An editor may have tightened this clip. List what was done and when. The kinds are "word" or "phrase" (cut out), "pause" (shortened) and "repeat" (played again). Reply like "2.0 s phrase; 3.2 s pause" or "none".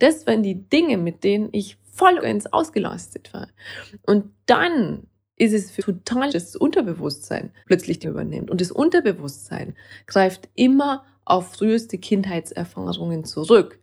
2.2 s word; 5.3 s pause; 5.8 s word; 6.3 s word; 7.6 s pause; 8.0 s word